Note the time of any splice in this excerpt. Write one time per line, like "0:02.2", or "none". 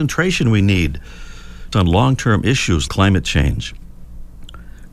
0:01.7
0:02.9